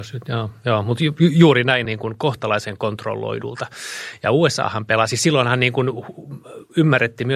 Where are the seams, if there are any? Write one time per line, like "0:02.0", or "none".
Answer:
0:01.9